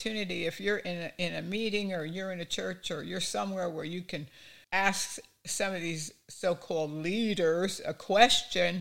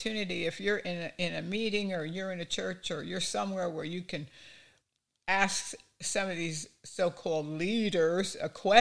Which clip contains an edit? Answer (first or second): first